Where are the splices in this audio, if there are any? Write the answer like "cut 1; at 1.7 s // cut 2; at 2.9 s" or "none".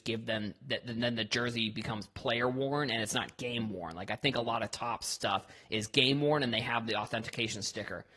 none

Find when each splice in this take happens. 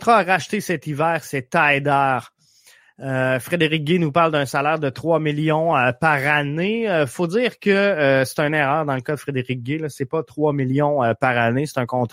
none

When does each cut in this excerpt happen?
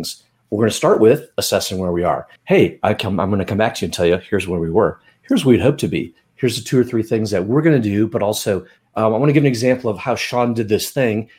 cut 1; at 2.4 s // cut 2; at 8.8 s

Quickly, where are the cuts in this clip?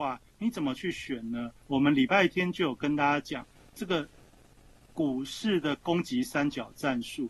none

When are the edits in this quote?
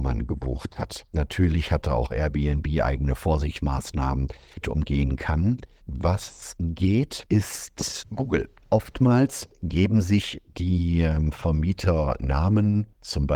cut 1; at 4.6 s // cut 2; at 8.0 s

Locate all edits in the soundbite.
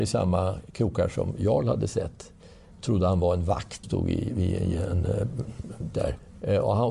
cut 1; at 3.8 s // cut 2; at 5.9 s

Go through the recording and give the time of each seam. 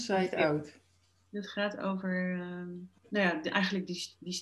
cut 1; at 3.0 s

